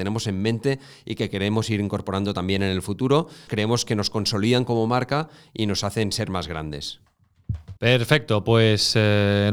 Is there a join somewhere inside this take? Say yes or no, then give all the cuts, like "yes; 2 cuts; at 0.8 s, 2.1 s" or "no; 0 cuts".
yes; 2 cuts; at 3.5 s, 7.8 s